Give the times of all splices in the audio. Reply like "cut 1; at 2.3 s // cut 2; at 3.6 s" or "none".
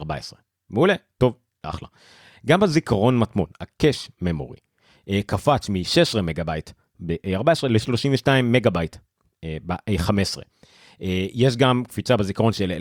none